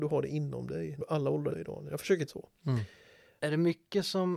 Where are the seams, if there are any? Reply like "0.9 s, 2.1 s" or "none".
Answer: 1.0 s, 1.5 s, 2.3 s